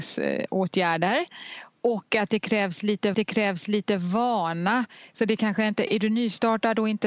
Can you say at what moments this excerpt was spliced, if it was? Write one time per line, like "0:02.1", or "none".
0:03.1